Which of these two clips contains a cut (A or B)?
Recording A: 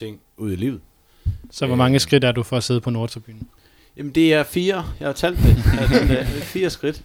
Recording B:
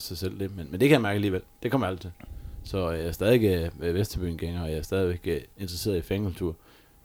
B